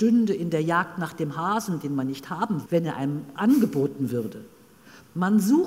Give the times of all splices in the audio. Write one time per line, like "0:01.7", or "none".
0:02.7
0:03.4